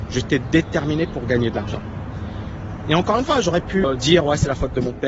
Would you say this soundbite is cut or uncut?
uncut